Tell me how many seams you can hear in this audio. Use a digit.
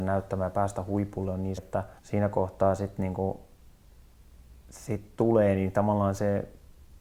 2